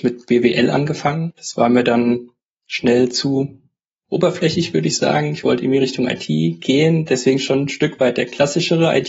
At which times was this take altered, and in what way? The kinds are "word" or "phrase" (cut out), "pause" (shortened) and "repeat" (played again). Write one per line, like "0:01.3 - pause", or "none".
none